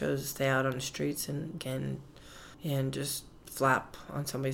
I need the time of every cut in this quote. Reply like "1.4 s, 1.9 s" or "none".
1.6 s, 2.5 s